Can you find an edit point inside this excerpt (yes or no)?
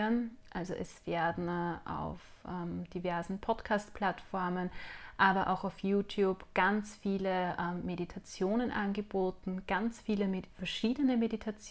no